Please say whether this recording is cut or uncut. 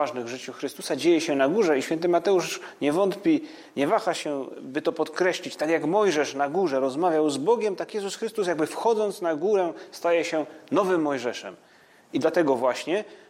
uncut